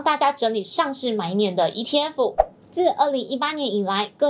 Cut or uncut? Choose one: uncut